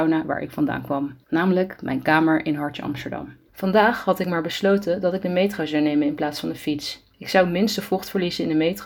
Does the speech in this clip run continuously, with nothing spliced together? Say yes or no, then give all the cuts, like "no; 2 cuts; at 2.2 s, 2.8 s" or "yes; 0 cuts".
no; 3 cuts; at 1.2 s, 3.5 s, 7.1 s